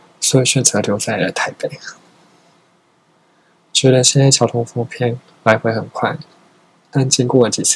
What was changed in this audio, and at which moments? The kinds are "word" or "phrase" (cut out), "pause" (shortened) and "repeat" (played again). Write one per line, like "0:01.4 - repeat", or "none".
none